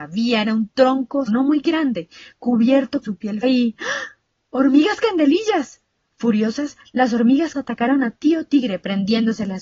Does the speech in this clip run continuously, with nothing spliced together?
no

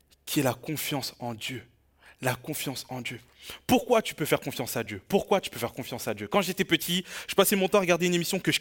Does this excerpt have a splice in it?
no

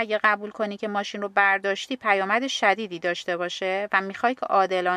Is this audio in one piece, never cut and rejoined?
yes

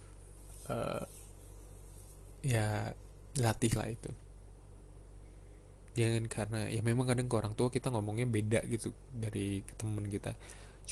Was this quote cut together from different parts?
no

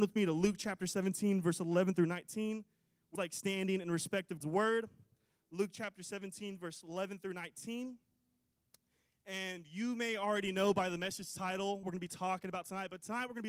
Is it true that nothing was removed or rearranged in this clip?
no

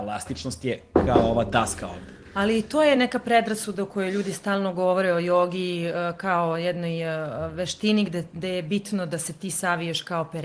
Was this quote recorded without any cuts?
yes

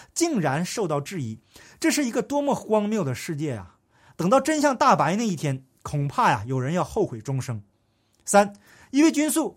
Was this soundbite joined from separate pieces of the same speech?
no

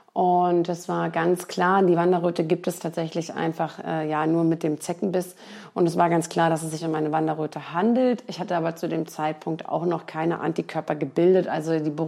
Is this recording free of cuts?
yes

